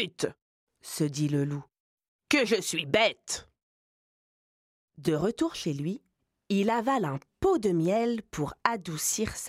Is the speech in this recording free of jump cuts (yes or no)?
yes